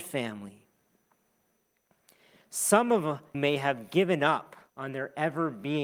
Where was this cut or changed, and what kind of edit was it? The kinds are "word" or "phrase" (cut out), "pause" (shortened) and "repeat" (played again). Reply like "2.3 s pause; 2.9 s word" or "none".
3.3 s word; 4.7 s pause